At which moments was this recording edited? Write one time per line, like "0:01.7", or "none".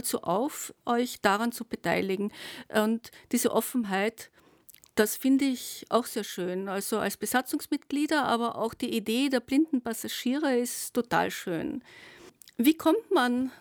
none